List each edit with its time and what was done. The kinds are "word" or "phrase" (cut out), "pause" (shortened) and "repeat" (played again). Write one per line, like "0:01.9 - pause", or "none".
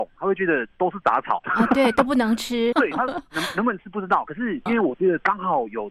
0:02.7 - word
0:04.7 - word